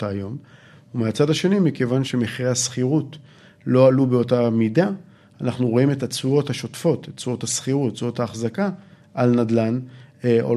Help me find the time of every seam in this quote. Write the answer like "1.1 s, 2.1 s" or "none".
none